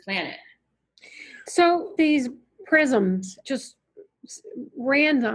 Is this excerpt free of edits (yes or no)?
no